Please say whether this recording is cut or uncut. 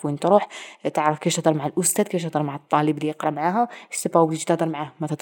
uncut